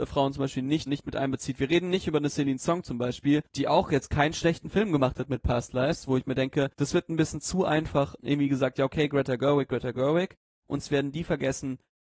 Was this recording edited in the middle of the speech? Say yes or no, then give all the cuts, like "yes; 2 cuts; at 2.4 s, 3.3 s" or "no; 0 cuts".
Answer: yes; 2 cuts; at 3.5 s, 6.7 s